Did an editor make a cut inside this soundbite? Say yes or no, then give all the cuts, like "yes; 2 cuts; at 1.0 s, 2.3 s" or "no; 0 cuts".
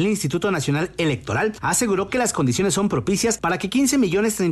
no; 0 cuts